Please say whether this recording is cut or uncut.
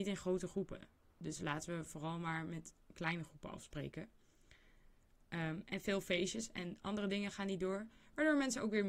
uncut